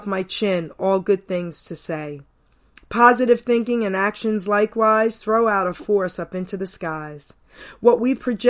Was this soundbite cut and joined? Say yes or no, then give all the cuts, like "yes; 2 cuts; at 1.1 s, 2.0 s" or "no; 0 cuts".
no; 0 cuts